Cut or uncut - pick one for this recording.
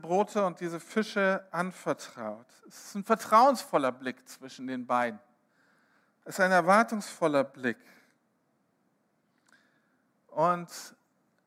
uncut